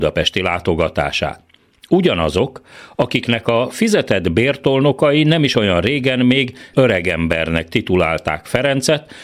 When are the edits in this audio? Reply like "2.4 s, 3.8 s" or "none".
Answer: 6.7 s